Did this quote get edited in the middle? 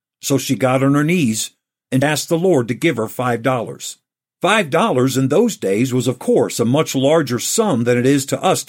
yes; 1 cut; at 2.0 s

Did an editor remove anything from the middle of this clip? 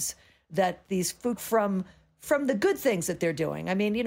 yes; 1 cut; at 1.4 s

